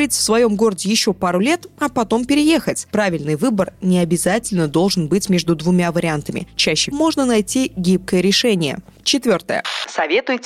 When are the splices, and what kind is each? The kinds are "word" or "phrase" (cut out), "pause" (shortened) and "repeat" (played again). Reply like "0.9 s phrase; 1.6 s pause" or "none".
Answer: 6.9 s word